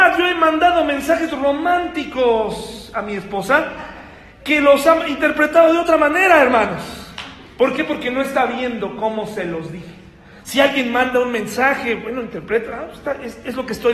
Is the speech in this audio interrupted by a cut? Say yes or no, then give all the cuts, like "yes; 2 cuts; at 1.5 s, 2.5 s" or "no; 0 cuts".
no; 0 cuts